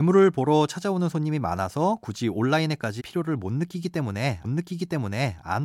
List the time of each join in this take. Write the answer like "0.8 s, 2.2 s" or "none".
3.0 s, 4.4 s